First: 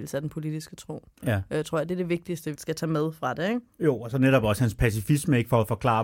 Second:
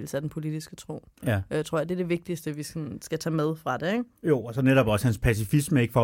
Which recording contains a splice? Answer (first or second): first